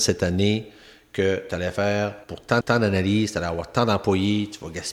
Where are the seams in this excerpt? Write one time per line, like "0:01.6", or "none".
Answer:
0:02.2
0:02.6